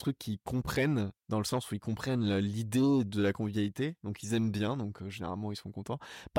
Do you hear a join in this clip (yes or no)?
yes